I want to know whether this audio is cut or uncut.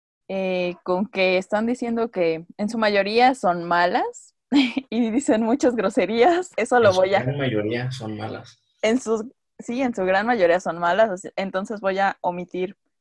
cut